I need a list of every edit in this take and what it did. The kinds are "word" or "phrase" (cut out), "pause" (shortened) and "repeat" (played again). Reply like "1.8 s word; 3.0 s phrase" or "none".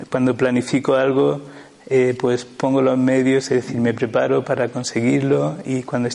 none